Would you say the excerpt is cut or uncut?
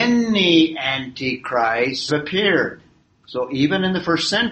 cut